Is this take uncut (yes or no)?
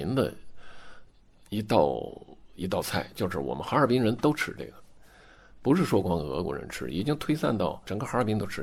yes